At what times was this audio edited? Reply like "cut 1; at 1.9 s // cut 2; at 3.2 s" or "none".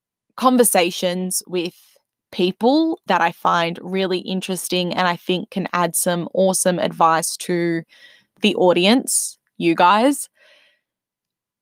cut 1; at 3.1 s